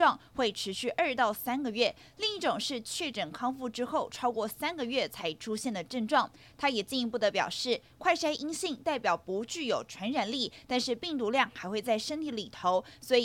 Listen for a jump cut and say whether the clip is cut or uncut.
uncut